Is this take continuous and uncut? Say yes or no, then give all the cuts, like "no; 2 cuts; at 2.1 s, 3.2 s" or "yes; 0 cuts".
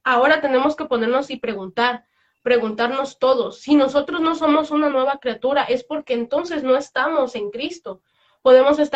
yes; 0 cuts